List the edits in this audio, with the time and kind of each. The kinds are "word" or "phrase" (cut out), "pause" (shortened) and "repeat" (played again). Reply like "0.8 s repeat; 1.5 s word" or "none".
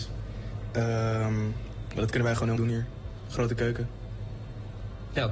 2.6 s word

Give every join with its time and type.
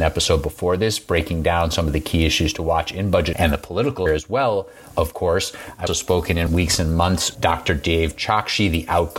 3.3 s word; 4.1 s word; 5.9 s word; 6.5 s word; 7.3 s word

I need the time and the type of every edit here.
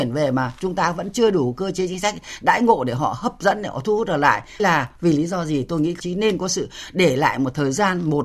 4.6 s word; 6.0 s word

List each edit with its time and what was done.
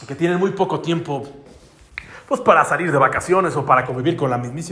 none

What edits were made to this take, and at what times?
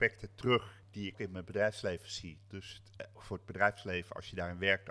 1.1 s word; 3.1 s word

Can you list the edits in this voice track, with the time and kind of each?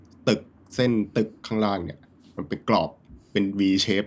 none

